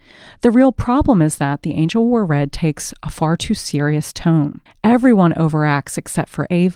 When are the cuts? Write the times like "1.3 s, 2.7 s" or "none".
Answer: 4.7 s